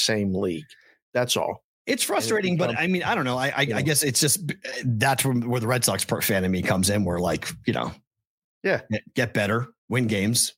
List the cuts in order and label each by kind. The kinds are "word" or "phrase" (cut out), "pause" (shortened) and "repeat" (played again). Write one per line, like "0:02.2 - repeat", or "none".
none

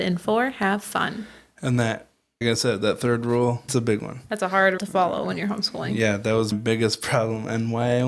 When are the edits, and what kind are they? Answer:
0:02.4 - word
0:03.7 - word
0:04.8 - word
0:06.5 - word

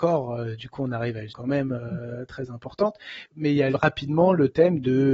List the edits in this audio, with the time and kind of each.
0:01.3 - word
0:03.7 - word

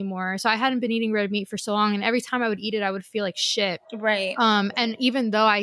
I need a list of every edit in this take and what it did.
0:03.8 - pause

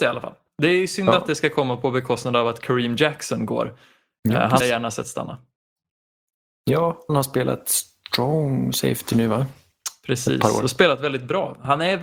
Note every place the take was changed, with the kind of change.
0:04.6 - word
0:07.1 - word

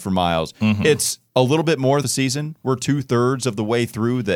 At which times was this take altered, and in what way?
0:01.3 - pause
0:02.0 - phrase

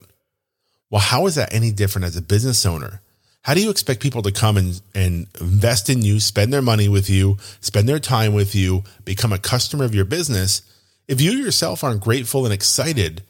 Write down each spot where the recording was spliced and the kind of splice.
none

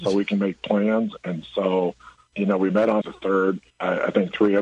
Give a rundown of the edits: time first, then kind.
0:02.3 - word
0:03.0 - word
0:03.7 - pause

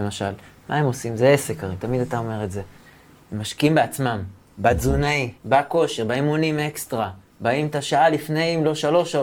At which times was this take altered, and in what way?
0:02.9 - pause
0:05.4 - pause

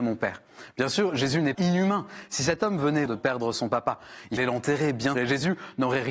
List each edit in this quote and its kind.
0:01.5 - word
0:03.1 - word
0:04.4 - word
0:05.1 - word

